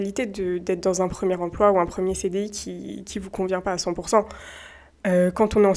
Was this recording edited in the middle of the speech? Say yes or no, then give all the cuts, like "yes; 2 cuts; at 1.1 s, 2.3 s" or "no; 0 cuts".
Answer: no; 0 cuts